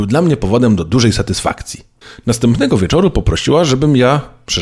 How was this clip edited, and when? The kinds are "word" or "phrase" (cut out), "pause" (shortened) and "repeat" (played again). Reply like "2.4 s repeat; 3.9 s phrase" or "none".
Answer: 2.0 s pause